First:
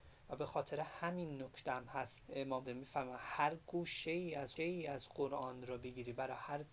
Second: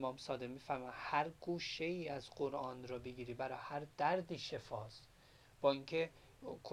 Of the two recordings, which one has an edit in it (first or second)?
first